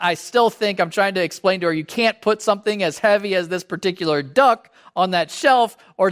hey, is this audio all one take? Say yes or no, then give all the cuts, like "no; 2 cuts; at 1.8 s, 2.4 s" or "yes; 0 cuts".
yes; 0 cuts